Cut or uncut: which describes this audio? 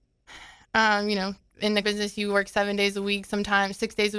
cut